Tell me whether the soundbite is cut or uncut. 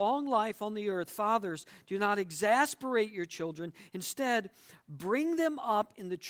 uncut